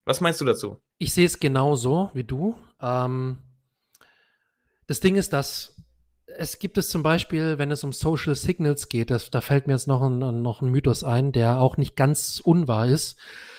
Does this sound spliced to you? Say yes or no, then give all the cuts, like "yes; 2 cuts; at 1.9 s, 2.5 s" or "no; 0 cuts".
yes; 1 cut; at 0.9 s